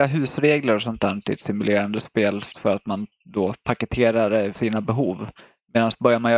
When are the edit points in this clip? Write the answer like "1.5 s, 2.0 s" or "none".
2.5 s, 4.5 s